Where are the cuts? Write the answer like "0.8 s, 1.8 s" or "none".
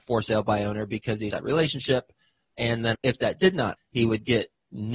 1.3 s, 2.9 s, 3.8 s